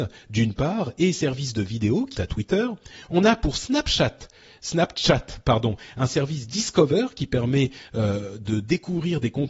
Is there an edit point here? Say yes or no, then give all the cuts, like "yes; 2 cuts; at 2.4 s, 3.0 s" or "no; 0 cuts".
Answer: yes; 1 cut; at 2.1 s